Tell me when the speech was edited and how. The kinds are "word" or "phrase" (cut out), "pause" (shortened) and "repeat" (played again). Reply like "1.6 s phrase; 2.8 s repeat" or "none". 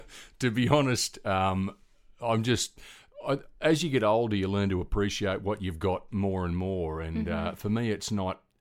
none